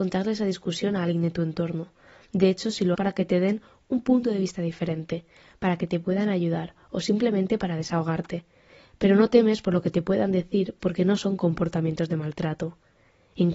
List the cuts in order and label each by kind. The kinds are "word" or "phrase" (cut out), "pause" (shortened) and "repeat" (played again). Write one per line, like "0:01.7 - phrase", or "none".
0:02.9 - phrase